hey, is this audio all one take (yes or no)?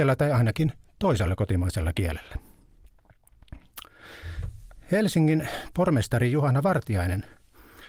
yes